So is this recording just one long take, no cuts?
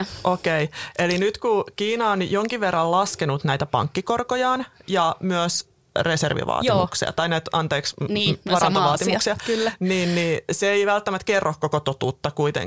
yes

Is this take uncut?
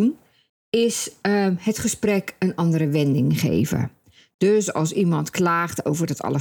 yes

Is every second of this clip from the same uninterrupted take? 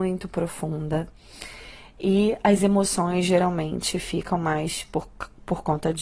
yes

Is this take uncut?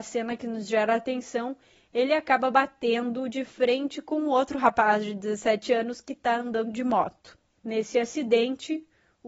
yes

